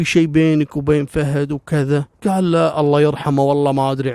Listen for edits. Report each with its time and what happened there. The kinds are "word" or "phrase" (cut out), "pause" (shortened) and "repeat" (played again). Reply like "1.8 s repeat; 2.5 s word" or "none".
2.1 s pause